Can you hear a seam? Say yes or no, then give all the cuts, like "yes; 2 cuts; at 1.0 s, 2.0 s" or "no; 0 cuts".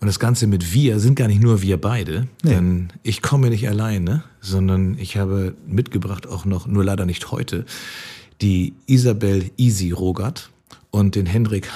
no; 0 cuts